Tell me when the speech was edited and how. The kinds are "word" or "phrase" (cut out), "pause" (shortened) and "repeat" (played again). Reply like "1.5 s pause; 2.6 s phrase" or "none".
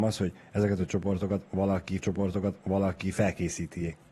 2.0 s repeat